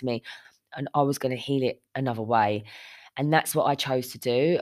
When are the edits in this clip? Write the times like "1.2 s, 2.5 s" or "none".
1.9 s

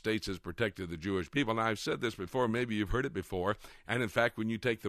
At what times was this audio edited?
none

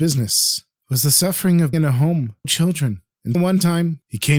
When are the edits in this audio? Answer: 1.7 s, 2.4 s, 3.3 s

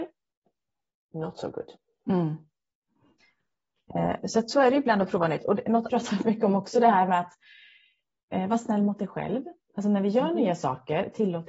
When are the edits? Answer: 5.9 s

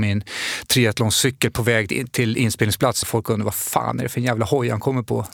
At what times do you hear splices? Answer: 3.0 s

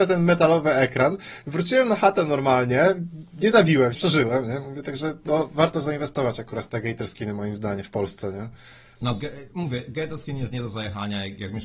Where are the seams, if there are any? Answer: 3.9 s

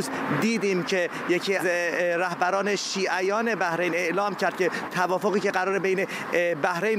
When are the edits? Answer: 1.6 s, 4.9 s

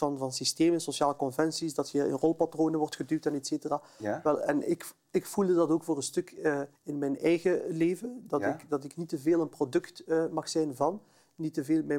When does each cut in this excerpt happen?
6.7 s

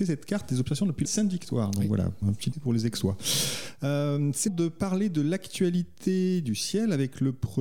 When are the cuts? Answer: 1.0 s, 2.2 s, 2.5 s, 4.5 s

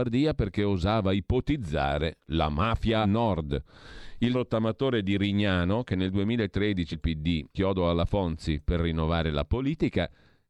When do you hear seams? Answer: 3.0 s, 4.3 s, 6.9 s, 7.5 s

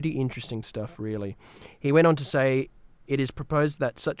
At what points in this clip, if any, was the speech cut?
none

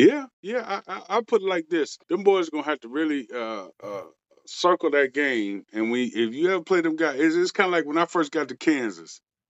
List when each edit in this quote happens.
2.0 s, 3.7 s

